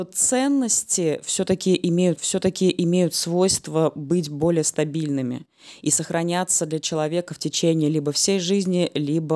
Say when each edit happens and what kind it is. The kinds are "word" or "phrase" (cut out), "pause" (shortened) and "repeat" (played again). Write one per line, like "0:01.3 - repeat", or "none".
0:02.2 - repeat